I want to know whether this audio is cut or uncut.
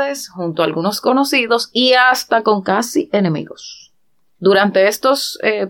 uncut